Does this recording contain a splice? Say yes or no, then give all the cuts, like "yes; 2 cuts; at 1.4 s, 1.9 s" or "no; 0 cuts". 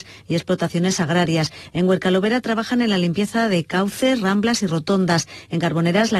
no; 0 cuts